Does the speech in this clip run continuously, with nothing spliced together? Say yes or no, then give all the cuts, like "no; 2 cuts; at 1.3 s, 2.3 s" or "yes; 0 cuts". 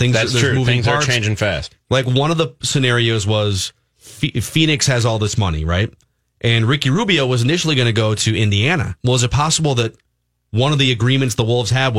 yes; 0 cuts